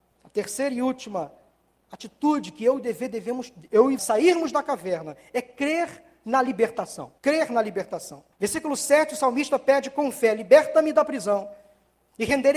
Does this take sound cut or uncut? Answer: cut